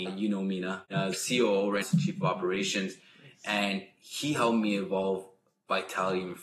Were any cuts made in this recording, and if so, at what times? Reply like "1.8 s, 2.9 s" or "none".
1.1 s, 1.8 s

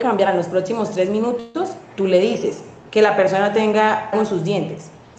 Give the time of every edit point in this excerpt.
2.9 s, 4.1 s

